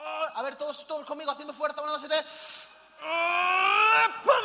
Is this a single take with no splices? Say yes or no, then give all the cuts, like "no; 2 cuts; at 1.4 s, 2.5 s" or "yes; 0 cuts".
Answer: yes; 0 cuts